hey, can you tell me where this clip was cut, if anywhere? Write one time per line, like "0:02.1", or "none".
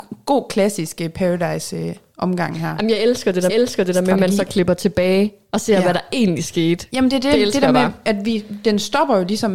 0:03.5